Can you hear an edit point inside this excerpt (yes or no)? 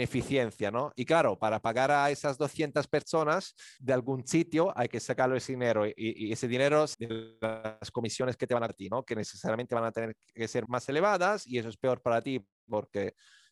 yes